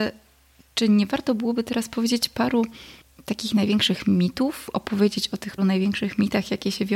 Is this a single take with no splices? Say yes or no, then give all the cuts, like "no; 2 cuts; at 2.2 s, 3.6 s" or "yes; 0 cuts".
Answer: no; 1 cut; at 5.6 s